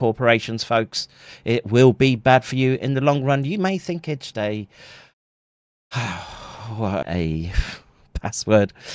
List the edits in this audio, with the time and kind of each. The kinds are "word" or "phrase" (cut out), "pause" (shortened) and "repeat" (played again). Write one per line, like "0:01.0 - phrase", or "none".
0:04.3 - word
0:07.0 - phrase